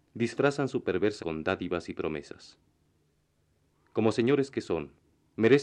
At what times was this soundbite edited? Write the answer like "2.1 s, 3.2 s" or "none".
1.2 s

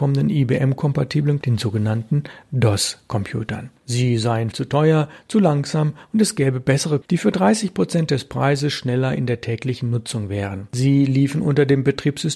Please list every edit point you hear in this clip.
1.4 s, 4.5 s, 7.0 s

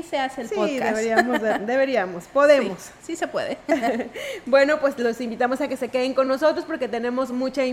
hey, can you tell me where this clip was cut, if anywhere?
none

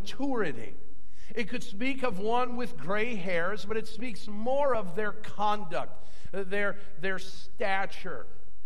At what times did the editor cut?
none

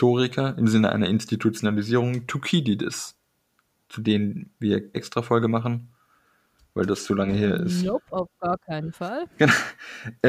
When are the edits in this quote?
4.9 s

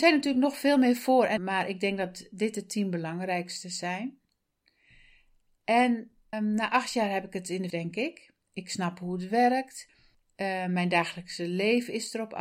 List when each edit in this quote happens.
1.4 s, 6.3 s, 7.7 s

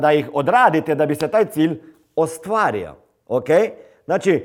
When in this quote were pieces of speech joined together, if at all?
none

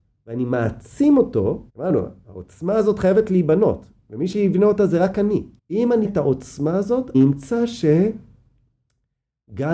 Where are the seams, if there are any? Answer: 1.7 s, 5.6 s, 6.0 s, 7.1 s

